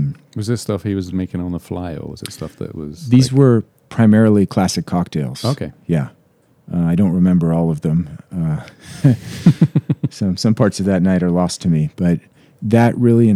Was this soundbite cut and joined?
no; 0 cuts

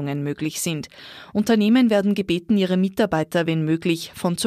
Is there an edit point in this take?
no; 0 cuts

